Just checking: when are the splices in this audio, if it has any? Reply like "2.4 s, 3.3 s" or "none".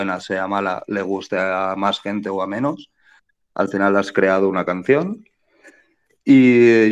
none